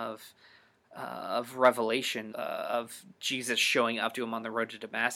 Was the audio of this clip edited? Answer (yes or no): yes